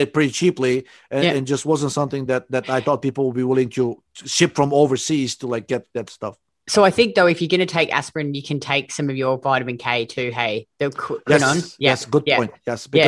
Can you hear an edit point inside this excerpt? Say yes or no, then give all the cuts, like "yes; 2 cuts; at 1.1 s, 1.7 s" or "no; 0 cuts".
no; 0 cuts